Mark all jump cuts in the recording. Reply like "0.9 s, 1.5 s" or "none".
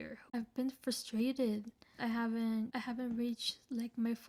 2.0 s